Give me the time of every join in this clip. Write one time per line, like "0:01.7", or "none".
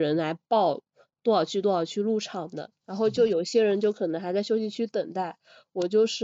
0:02.8